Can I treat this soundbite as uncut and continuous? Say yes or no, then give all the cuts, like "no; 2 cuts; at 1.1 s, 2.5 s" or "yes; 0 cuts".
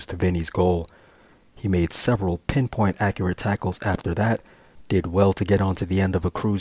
yes; 0 cuts